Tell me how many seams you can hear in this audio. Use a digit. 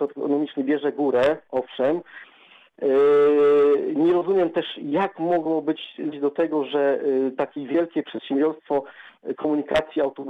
1